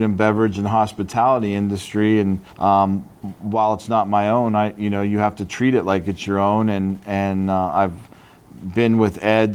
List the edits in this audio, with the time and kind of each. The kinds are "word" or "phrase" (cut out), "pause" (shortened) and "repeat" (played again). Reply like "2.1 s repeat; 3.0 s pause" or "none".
2.5 s pause